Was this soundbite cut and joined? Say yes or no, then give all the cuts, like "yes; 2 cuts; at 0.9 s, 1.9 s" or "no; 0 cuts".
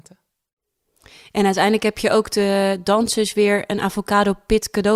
no; 0 cuts